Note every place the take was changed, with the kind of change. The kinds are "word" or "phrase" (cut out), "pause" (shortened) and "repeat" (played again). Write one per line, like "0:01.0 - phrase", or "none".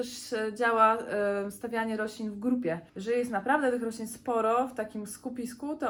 0:02.9 - pause